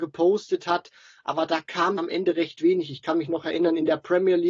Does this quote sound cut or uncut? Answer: cut